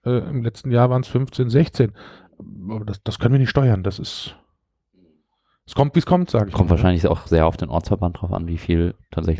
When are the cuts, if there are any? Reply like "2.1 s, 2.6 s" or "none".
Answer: none